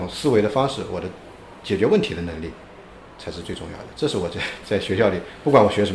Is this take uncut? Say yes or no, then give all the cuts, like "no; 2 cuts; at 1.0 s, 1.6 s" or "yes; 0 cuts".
yes; 0 cuts